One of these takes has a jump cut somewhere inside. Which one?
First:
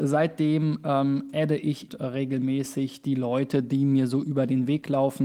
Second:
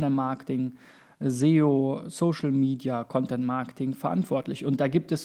first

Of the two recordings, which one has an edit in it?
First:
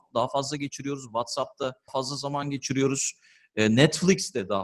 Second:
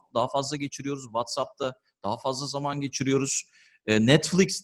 first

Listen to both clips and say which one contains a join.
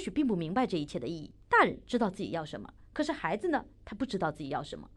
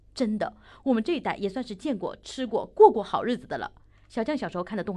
first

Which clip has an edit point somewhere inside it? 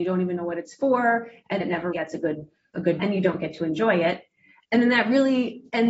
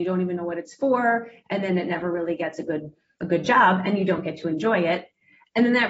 first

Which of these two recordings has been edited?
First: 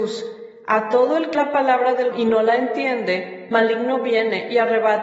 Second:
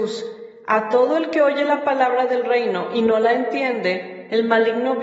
first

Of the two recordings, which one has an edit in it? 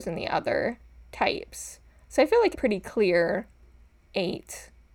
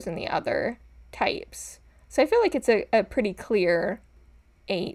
first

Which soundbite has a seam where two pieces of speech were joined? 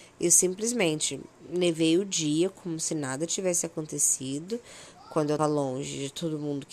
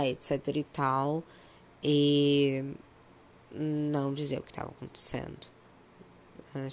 first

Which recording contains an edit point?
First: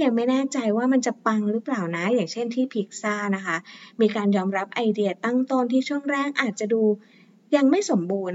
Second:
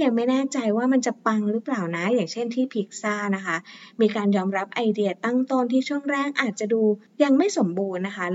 second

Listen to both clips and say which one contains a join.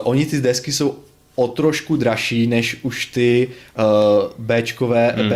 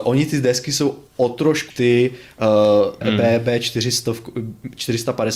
second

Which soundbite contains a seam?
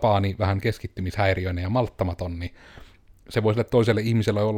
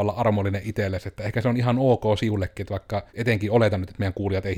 second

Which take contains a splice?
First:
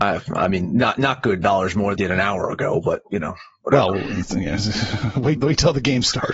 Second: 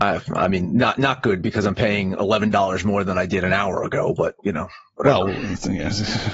first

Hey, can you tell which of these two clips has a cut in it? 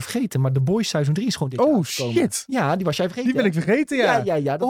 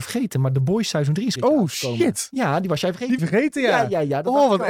second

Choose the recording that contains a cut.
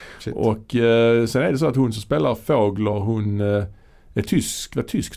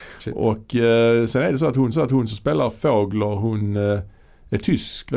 second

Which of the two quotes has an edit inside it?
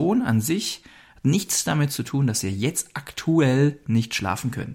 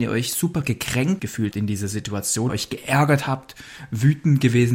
second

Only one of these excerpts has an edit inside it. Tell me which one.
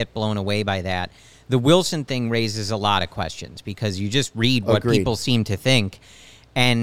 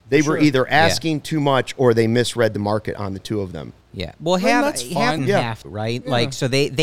second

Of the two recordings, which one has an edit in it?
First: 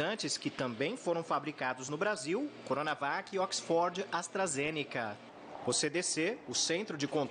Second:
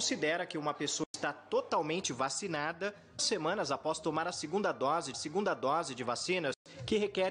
second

